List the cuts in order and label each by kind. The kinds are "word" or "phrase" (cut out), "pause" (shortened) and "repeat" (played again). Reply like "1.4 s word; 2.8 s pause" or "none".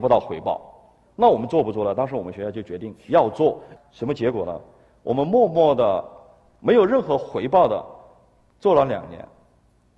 none

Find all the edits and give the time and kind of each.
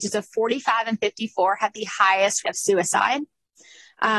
2.4 s word

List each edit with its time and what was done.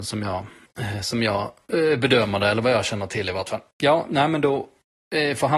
3.7 s pause

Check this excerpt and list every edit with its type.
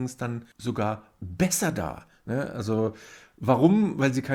none

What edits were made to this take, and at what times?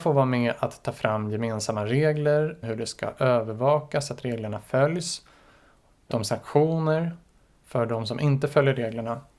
2.6 s phrase; 6.1 s word

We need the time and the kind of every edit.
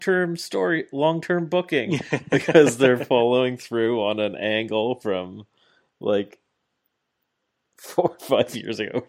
none

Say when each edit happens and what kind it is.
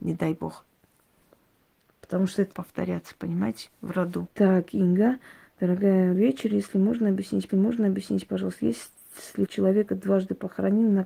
2.5 s phrase; 3.7 s pause; 4.3 s pause; 6.2 s word; 7.5 s repeat; 9.5 s word

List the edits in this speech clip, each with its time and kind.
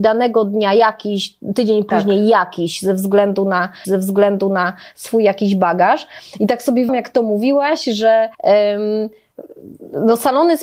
3.8 s repeat; 6.9 s word; 8.3 s pause

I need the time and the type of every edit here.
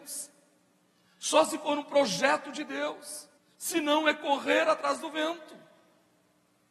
3.4 s pause

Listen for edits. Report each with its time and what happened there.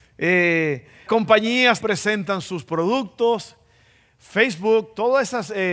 1.1 s word; 1.8 s word

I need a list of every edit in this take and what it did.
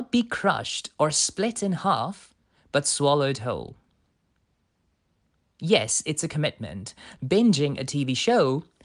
7.2 s word

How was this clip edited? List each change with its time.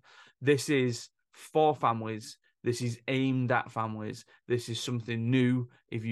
none

